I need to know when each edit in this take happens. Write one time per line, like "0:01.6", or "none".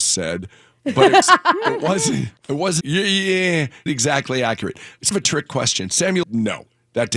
0:01.2
0:02.4
0:02.8
0:03.9
0:05.1
0:06.2

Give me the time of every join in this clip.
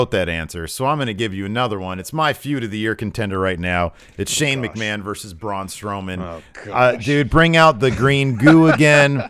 none

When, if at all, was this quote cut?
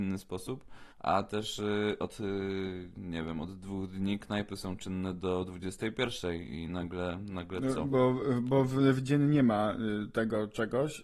0:00.9

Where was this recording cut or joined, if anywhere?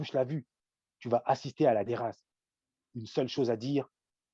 0:01.9

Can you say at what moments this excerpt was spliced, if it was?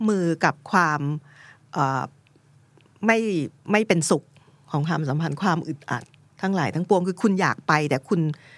0:06.2

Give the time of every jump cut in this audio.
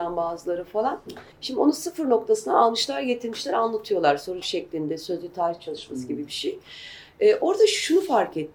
0:01.3
0:04.4

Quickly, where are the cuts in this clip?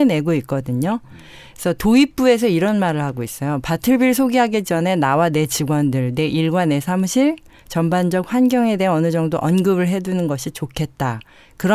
none

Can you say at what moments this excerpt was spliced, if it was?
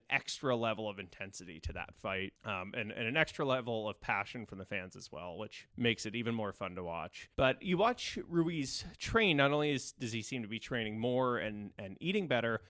0:02.4
0:05.7
0:07.3

